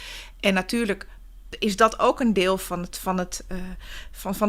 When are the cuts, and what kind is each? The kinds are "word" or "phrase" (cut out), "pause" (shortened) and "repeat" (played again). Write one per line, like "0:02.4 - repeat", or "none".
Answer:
none